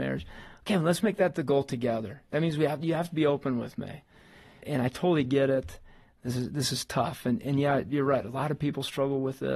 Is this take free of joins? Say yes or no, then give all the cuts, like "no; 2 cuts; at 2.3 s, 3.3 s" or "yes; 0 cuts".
no; 1 cut; at 4.6 s